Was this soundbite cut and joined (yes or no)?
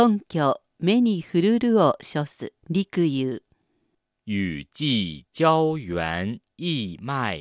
yes